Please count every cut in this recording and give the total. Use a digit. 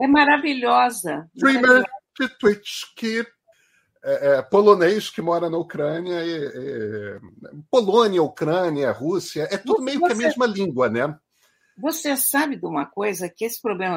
1